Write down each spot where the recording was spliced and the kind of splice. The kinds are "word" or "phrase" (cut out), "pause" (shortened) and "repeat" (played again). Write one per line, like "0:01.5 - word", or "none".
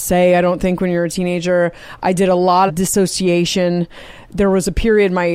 0:02.7 - phrase